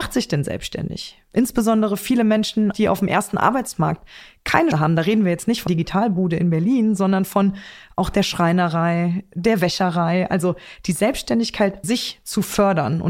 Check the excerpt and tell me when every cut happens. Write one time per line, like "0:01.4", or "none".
0:02.7
0:04.7
0:05.7
0:11.8